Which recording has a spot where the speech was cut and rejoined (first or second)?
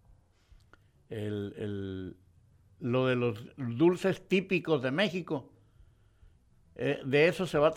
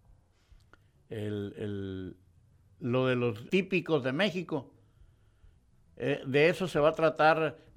second